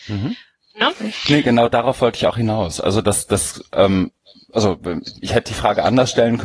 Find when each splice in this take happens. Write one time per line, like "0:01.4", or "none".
none